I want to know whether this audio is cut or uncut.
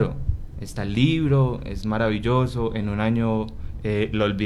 uncut